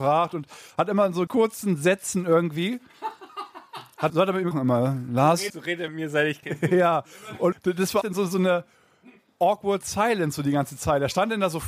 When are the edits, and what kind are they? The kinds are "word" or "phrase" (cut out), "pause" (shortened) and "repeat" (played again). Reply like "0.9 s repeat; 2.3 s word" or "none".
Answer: 1.3 s word; 4.1 s word; 4.5 s word; 5.5 s word; 5.9 s word; 6.4 s word; 7.5 s word; 8.0 s word